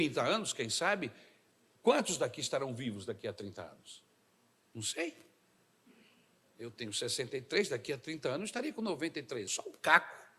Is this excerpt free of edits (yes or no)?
no